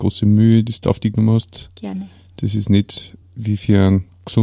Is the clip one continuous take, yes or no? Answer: yes